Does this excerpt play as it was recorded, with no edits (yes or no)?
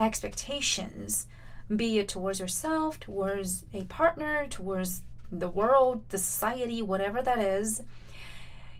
yes